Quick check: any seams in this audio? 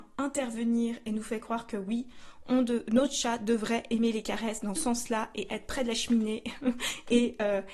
yes; 1 cut; at 4.8 s

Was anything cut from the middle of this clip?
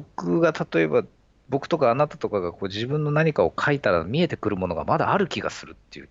no; 0 cuts

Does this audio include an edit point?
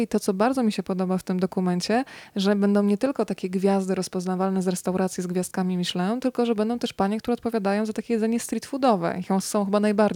no; 0 cuts

